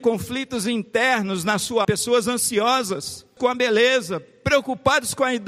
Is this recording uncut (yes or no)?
no